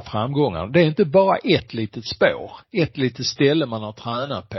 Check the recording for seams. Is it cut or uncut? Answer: cut